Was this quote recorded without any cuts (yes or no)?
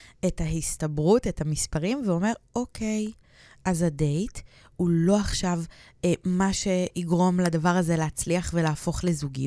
yes